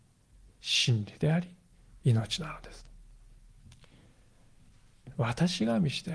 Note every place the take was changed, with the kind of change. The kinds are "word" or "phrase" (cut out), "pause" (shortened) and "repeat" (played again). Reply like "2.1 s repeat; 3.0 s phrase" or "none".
none